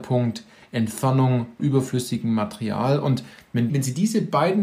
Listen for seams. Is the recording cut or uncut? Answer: cut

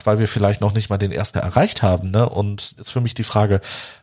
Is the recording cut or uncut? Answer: cut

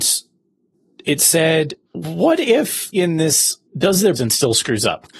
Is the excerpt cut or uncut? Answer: cut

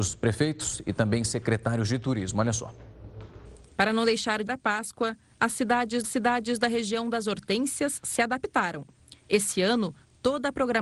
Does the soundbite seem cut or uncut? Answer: cut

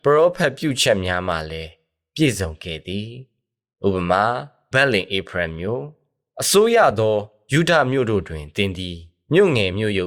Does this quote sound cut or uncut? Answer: cut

